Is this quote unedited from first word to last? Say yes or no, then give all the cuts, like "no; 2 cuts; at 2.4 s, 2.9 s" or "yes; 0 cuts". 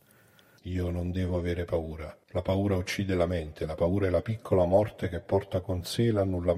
no; 1 cut; at 2.2 s